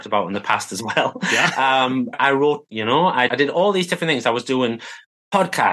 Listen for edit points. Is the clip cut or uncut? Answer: cut